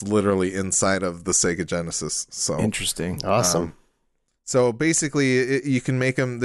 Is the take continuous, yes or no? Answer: yes